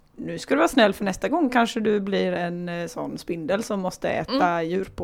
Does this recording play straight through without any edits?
yes; 0 cuts

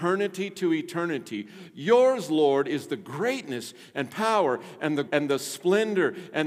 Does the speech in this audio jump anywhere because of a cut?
yes; 1 cut; at 5.1 s

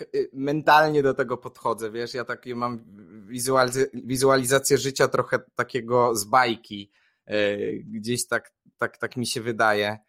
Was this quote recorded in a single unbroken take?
yes; 0 cuts

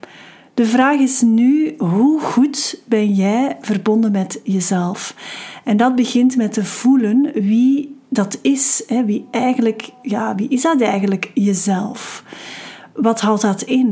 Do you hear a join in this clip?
yes; 1 cut; at 8.0 s

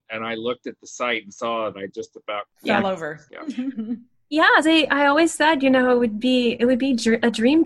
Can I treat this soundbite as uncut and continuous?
no; 2 cuts; at 1.7 s, 4.6 s

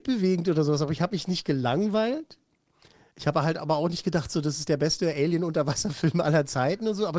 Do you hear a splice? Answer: no; 0 cuts

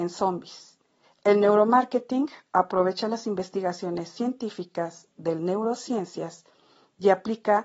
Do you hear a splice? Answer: yes; 2 cuts; at 1.0 s, 5.4 s

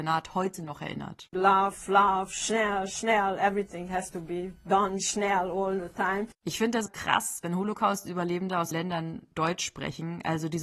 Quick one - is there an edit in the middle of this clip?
yes; 3 cuts; at 6.3 s, 6.9 s, 8.7 s

